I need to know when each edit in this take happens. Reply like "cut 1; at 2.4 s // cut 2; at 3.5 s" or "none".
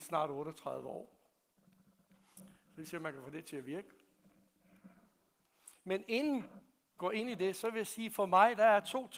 cut 1; at 7.0 s